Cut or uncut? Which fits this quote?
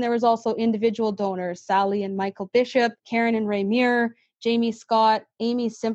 cut